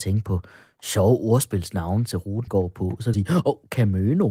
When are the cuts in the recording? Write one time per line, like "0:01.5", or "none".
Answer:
0:02.5
0:03.1